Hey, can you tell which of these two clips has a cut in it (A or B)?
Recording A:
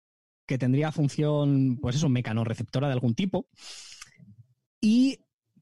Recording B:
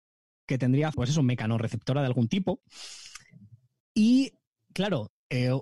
B